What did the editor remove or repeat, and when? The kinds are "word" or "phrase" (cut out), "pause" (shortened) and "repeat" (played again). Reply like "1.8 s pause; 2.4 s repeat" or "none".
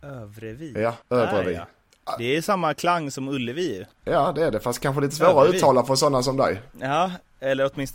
1.0 s pause; 3.9 s pause; 6.7 s pause